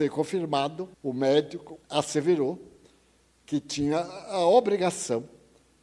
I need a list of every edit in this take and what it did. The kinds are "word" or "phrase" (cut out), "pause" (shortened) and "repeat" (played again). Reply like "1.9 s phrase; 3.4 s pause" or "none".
0.9 s pause; 1.8 s pause